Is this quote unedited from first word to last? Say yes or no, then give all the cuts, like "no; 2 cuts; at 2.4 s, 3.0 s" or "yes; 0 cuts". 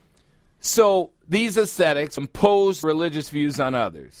no; 2 cuts; at 2.2 s, 2.8 s